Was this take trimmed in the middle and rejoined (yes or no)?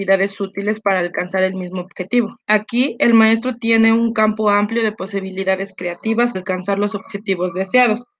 yes